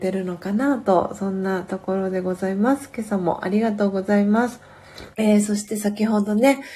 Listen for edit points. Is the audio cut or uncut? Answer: cut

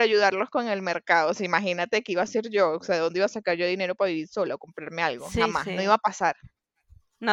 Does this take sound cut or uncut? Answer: uncut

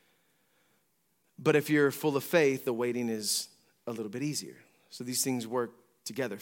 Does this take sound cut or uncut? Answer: uncut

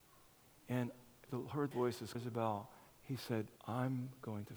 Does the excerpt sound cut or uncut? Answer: cut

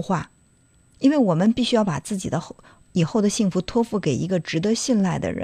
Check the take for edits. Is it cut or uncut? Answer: uncut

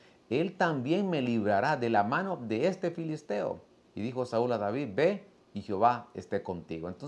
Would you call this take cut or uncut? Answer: uncut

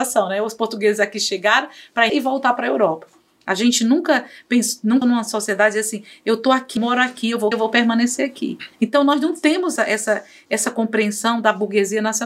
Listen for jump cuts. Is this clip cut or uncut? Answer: cut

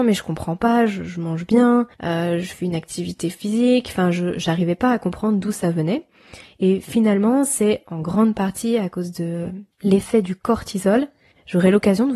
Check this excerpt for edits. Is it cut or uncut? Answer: cut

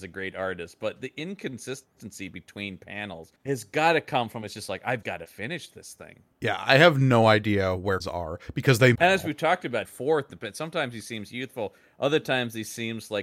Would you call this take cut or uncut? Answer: cut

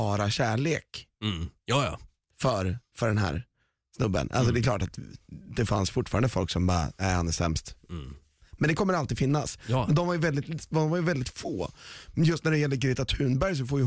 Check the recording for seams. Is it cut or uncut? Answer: uncut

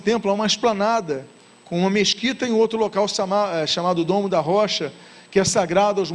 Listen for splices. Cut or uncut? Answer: uncut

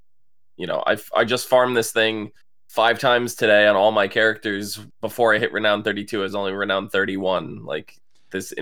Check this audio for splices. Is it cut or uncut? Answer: uncut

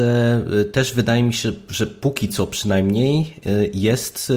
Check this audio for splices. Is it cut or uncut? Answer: uncut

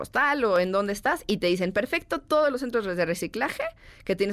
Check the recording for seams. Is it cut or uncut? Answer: uncut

